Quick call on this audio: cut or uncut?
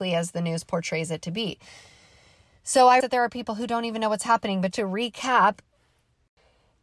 cut